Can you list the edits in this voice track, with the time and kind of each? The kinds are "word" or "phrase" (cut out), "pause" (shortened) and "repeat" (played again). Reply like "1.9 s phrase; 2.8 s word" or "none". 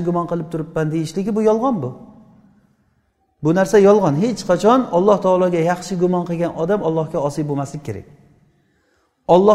none